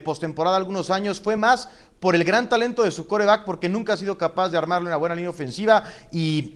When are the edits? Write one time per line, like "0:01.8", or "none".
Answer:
none